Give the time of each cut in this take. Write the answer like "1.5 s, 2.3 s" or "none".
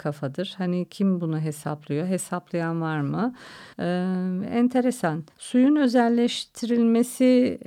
3.7 s, 5.3 s